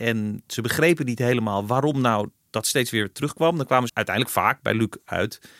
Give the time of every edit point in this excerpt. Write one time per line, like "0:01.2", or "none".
0:03.9

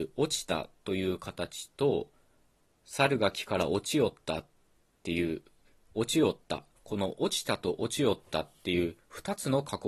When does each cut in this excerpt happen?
none

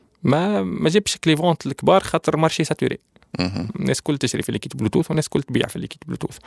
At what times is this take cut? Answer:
none

